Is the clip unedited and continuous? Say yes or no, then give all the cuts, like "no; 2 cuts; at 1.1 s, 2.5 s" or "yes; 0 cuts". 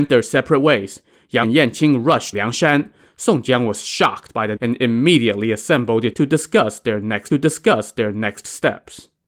no; 5 cuts; at 1.4 s, 2.3 s, 4.6 s, 6.1 s, 7.3 s